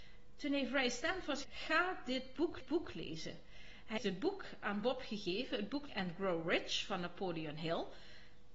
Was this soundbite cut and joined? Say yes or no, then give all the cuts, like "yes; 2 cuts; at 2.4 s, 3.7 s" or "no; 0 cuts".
yes; 4 cuts; at 1.4 s, 2.6 s, 4.0 s, 5.9 s